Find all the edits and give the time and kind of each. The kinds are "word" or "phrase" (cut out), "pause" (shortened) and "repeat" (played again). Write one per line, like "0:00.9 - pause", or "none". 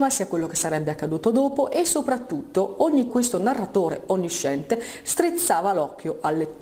0:03.1 - word